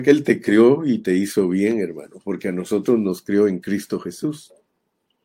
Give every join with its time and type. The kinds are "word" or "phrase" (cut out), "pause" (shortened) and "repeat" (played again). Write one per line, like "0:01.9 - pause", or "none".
none